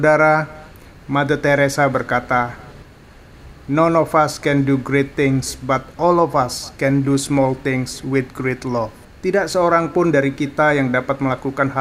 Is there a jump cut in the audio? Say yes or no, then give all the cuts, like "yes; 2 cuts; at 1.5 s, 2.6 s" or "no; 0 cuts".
yes; 1 cut; at 9.0 s